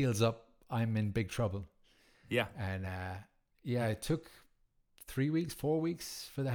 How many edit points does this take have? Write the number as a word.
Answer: zero